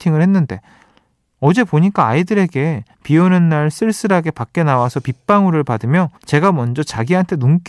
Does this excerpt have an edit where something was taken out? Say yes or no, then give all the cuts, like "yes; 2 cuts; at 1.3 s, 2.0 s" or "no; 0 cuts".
yes; 2 cuts; at 2.9 s, 6.2 s